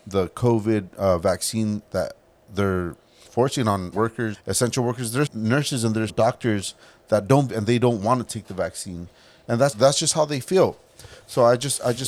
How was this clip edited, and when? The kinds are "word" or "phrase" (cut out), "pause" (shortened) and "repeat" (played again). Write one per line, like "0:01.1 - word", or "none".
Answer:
0:03.2 - word
0:03.9 - word
0:04.3 - word
0:05.3 - word
0:06.1 - word
0:07.5 - word
0:09.7 - word